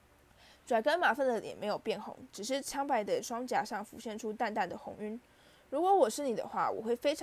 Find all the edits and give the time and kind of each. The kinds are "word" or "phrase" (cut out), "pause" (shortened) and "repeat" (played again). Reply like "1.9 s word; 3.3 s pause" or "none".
none